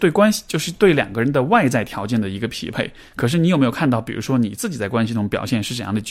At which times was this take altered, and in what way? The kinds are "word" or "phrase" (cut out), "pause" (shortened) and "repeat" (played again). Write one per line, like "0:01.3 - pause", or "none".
none